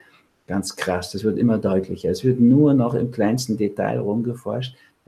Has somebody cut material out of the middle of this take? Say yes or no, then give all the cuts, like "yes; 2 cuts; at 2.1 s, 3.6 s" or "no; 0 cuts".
no; 0 cuts